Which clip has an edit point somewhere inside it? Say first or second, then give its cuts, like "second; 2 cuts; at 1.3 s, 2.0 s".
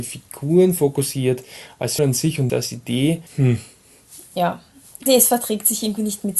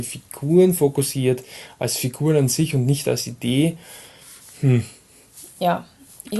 first; 4 cuts; at 2.0 s, 2.5 s, 3.3 s, 5.1 s